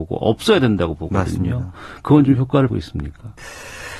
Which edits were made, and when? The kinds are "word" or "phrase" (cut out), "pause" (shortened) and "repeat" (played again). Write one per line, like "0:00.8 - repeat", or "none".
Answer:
0:02.7 - word